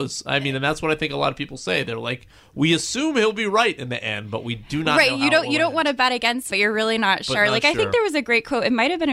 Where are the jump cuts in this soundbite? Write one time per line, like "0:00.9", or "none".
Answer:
0:06.5